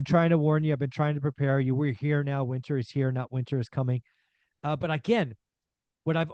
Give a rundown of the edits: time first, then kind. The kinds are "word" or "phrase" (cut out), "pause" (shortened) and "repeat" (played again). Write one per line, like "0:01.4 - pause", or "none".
none